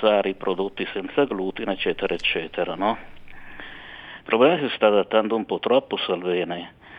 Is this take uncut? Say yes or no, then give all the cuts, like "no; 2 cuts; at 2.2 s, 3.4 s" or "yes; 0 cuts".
yes; 0 cuts